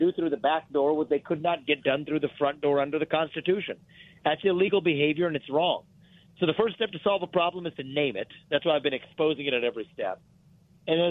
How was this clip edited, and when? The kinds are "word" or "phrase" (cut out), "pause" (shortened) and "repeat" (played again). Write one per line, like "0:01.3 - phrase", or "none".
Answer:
none

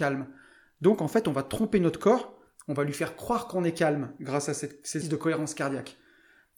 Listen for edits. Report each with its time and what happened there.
0:05.0 - word

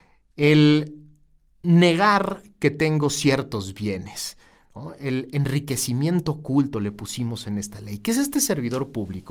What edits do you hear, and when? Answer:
none

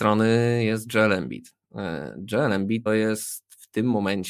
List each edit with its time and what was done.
0:01.6 - pause
0:02.9 - word

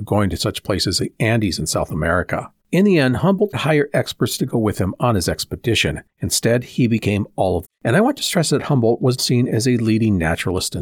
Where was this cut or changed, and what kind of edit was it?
0:01.0 - word
0:02.6 - pause
0:03.5 - word
0:06.1 - pause
0:07.6 - phrase
0:09.2 - word

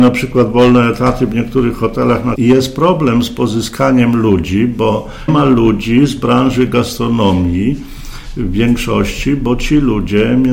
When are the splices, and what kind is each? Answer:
0:02.4 - word
0:05.3 - word

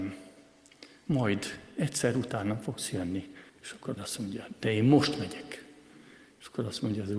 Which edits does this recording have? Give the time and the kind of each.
0:03.5 - pause
0:04.0 - word

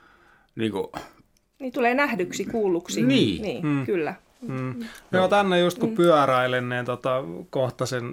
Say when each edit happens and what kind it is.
none

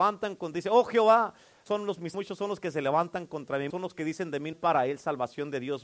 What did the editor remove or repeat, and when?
0:01.7 - word
0:02.1 - word
0:03.7 - word
0:04.5 - phrase

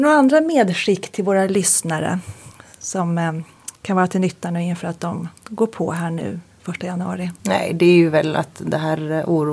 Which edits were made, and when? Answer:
0:03.7 - pause
0:07.4 - pause

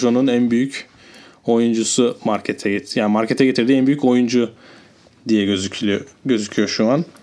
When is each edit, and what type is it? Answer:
none

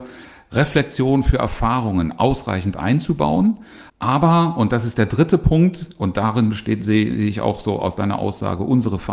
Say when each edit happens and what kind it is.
0:03.9 - pause

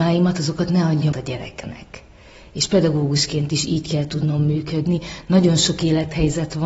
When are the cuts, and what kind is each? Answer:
0:01.1 - word

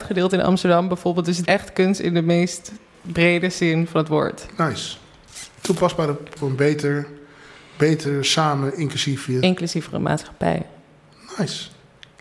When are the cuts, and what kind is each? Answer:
0:01.5 - word
0:02.9 - word
0:06.4 - word

